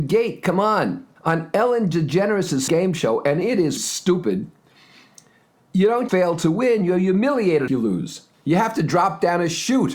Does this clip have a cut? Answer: yes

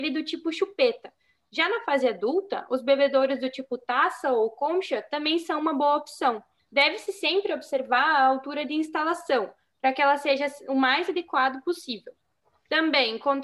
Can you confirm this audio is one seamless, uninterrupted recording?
no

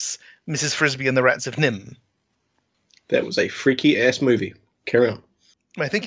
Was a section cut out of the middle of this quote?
no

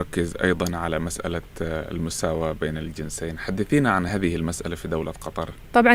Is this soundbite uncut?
yes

